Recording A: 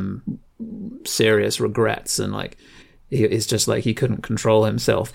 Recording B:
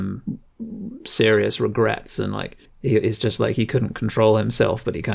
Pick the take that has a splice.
B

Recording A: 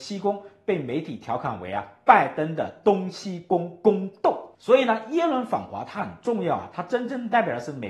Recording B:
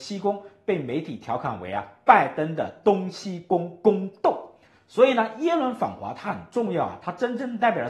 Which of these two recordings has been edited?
A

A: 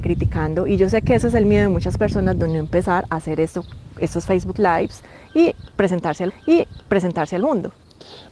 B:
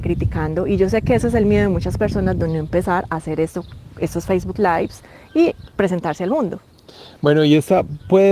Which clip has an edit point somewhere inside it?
A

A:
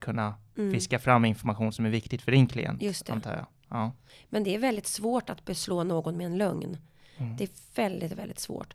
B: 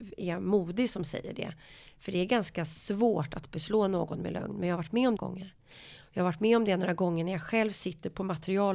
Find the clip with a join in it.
B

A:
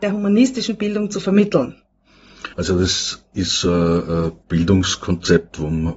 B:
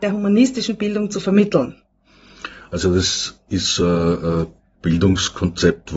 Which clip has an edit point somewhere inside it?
A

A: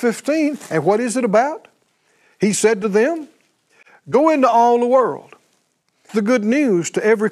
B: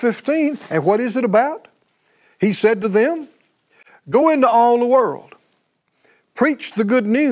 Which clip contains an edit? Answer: A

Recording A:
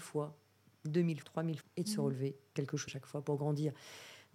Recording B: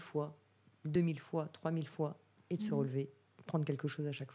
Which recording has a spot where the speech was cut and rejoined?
A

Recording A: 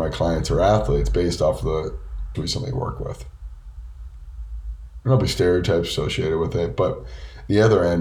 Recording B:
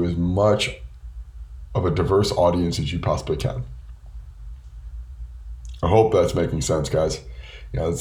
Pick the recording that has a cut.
A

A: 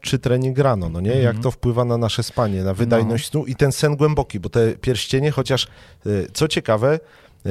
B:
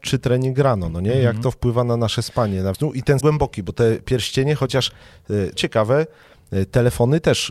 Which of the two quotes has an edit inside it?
B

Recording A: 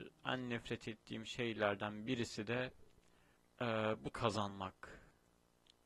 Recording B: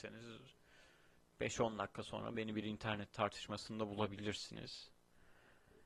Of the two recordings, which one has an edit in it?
A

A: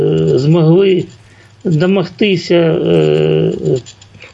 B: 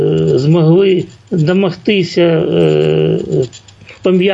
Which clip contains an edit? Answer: B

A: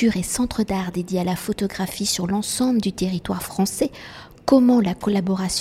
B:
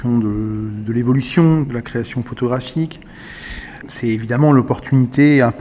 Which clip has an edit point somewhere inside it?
B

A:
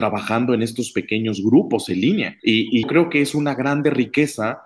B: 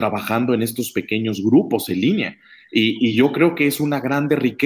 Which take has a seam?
A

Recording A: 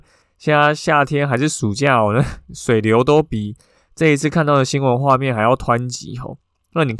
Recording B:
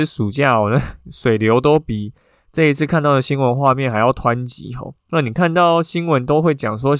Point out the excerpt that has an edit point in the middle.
B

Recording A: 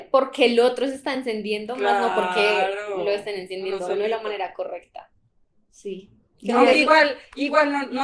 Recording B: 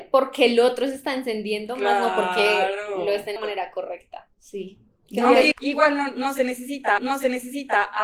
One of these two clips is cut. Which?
B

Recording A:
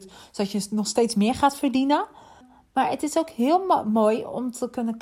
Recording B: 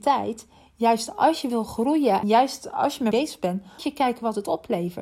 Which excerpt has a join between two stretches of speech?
B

